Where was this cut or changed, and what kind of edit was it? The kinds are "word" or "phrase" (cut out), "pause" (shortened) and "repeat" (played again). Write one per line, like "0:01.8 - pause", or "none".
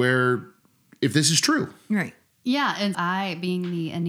0:02.9 - word